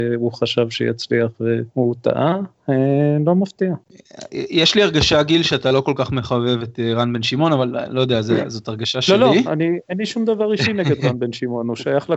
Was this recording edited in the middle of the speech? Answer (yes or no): yes